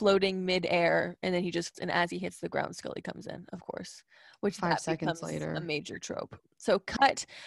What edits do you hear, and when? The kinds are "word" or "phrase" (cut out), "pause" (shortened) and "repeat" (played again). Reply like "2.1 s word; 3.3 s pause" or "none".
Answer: 1.7 s word